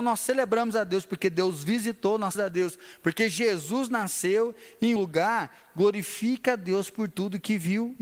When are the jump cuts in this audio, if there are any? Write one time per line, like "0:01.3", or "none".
0:02.3
0:05.0